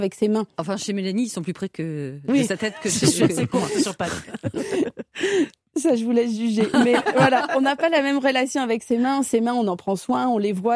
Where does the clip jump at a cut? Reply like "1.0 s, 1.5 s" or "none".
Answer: none